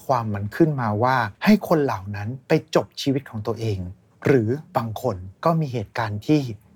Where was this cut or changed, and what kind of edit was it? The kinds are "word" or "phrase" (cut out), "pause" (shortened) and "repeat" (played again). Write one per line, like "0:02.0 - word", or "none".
0:01.3 - pause
0:04.7 - pause
0:05.3 - pause

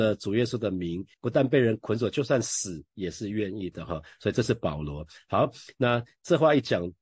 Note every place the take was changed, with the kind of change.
0:01.1 - pause
0:02.9 - pause

